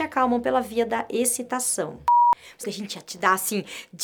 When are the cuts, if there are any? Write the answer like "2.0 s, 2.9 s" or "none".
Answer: 2.6 s

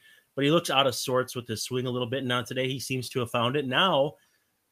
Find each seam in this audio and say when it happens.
none

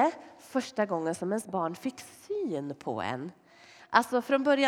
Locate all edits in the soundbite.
none

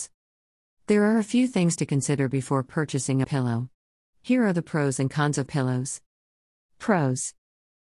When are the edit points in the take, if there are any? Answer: 3.2 s, 5.5 s

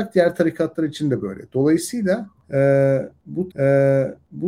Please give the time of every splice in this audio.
3.5 s

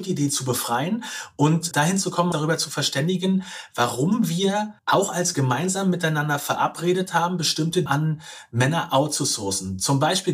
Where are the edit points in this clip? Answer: 1.7 s, 2.3 s, 4.8 s, 5.3 s, 7.9 s

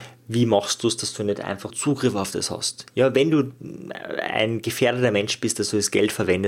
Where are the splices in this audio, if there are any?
1.7 s

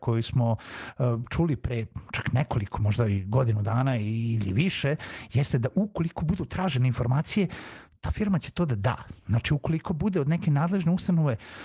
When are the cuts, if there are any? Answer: none

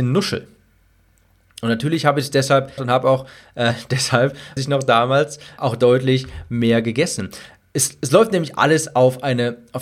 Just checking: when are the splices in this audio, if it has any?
2.8 s, 4.6 s, 5.6 s

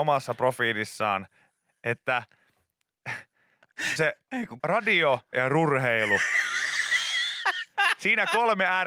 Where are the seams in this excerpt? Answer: 4.0 s, 4.3 s, 4.6 s, 5.3 s

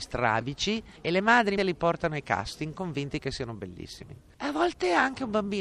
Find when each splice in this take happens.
1.6 s

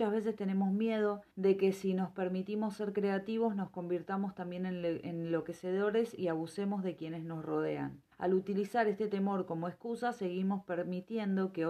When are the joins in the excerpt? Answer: 1.3 s, 8.1 s

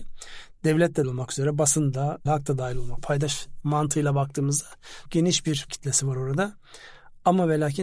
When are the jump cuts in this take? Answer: 1.0 s, 2.3 s, 3.0 s, 3.6 s, 5.1 s, 5.7 s

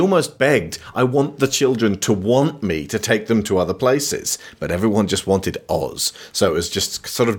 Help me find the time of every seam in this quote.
none

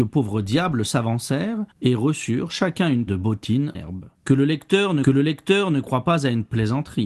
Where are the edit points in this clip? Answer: 1.7 s, 3.1 s, 3.7 s, 4.1 s, 5.0 s

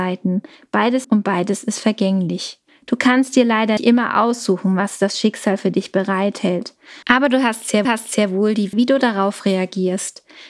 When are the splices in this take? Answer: 1.0 s, 2.7 s, 3.8 s, 7.0 s, 7.8 s, 8.7 s

